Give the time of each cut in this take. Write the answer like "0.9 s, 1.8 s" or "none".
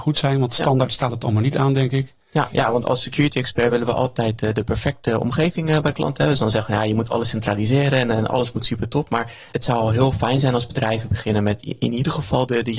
2.8 s, 9.5 s